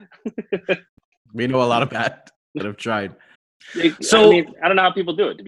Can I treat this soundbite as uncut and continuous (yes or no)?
no